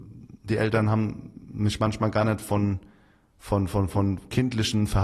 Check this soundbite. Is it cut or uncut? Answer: uncut